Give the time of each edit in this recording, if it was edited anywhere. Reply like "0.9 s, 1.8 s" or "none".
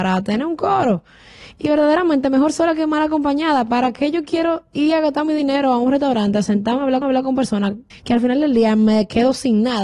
7.0 s, 7.9 s